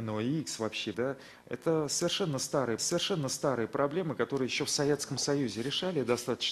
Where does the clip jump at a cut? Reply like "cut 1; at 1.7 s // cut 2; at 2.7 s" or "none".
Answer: cut 1; at 0.9 s // cut 2; at 2.8 s